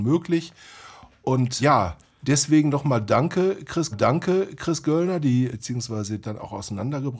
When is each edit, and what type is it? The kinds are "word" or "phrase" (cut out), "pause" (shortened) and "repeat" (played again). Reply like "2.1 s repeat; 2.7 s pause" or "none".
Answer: 1.6 s word; 2.0 s pause; 3.9 s repeat; 5.5 s word; 6.2 s phrase